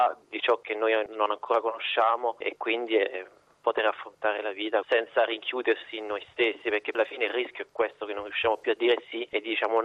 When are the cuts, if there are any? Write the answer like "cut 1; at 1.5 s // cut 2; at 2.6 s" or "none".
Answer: cut 1; at 6.9 s